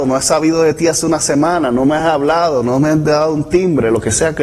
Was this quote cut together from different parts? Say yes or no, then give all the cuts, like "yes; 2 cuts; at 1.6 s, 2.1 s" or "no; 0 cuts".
no; 0 cuts